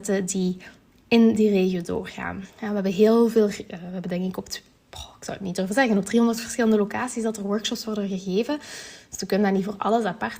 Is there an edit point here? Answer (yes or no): yes